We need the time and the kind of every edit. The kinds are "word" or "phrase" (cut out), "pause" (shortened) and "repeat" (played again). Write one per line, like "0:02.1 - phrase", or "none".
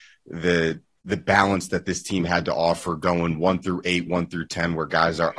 none